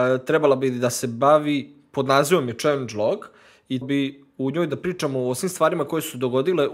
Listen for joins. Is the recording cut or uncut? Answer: cut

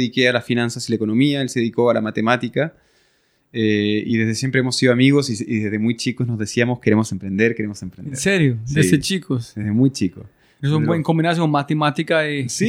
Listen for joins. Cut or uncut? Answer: uncut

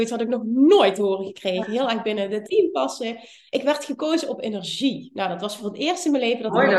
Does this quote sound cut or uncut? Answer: uncut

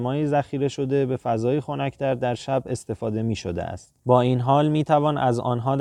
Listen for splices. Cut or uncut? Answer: cut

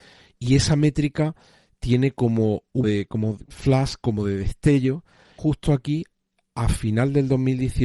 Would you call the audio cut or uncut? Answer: cut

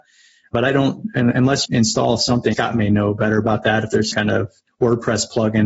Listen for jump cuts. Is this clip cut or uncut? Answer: cut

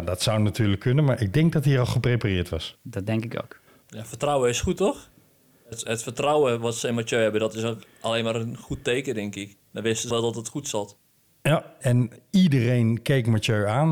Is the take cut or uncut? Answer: cut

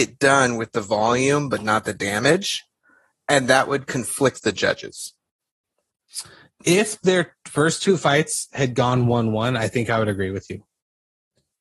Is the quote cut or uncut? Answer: uncut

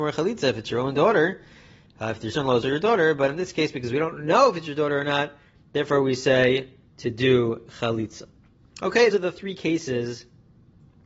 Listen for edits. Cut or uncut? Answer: cut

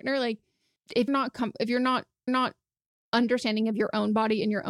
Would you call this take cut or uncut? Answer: cut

